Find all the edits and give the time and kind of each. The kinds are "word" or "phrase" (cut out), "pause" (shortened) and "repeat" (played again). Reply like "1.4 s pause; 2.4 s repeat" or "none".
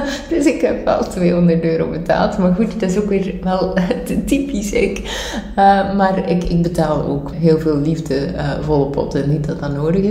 7.3 s word

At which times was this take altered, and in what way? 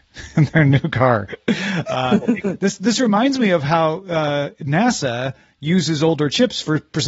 none

